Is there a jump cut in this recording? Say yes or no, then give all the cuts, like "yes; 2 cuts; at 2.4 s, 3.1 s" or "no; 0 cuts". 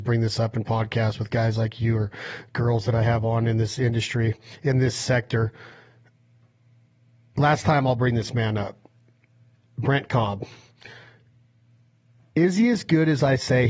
no; 0 cuts